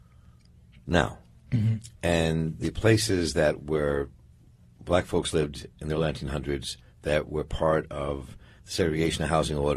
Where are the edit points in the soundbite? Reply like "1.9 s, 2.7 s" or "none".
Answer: none

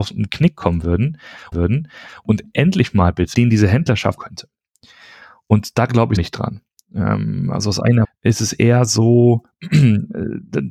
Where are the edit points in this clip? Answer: 1.5 s, 3.3 s, 4.2 s, 6.2 s, 8.0 s

